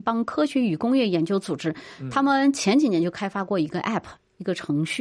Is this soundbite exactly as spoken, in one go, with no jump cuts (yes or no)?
yes